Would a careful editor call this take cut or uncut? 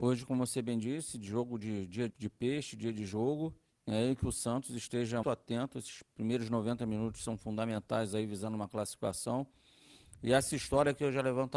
cut